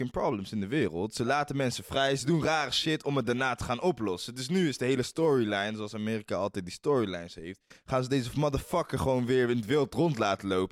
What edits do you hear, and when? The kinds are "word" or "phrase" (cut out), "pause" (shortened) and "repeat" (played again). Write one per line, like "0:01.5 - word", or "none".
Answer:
none